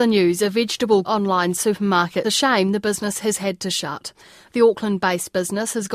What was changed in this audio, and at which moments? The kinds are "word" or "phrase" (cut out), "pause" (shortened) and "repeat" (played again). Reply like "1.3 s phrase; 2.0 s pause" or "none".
1.0 s phrase; 2.2 s phrase